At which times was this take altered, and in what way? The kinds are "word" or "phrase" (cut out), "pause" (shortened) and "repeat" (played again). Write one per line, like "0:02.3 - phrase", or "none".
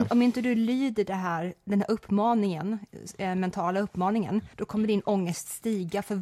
0:04.5 - pause